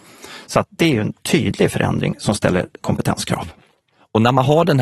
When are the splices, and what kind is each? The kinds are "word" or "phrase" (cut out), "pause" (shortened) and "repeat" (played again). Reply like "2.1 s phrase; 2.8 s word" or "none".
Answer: 2.8 s word